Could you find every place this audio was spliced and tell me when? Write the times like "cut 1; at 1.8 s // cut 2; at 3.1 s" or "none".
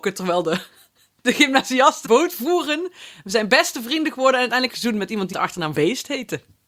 cut 1; at 1.2 s // cut 2; at 2.0 s // cut 3; at 4.7 s // cut 4; at 5.3 s // cut 5; at 5.7 s

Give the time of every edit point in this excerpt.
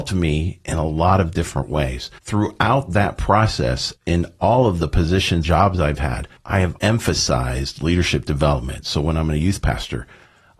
cut 1; at 2.2 s // cut 2; at 4.0 s // cut 3; at 5.4 s // cut 4; at 6.4 s // cut 5; at 6.8 s

